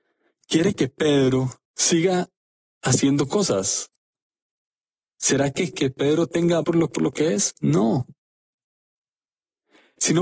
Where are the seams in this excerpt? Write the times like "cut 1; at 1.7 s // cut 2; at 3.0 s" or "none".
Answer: cut 1; at 1.6 s // cut 2; at 5.7 s // cut 3; at 6.6 s // cut 4; at 7.0 s

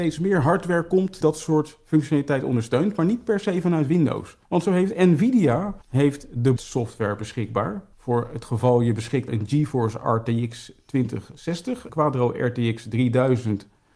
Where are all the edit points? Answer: cut 1; at 1.2 s // cut 2; at 4.4 s // cut 3; at 5.8 s // cut 4; at 6.6 s // cut 5; at 7.9 s // cut 6; at 9.3 s // cut 7; at 11.9 s

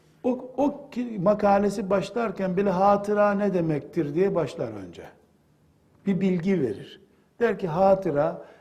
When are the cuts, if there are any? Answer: none

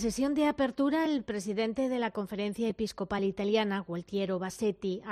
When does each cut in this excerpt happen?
none

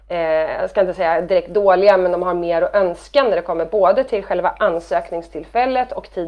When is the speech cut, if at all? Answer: none

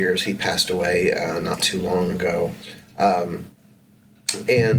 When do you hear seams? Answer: none

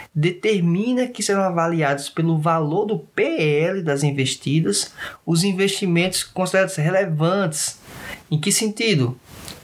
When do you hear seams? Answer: none

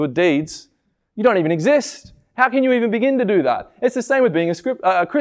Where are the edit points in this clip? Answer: none

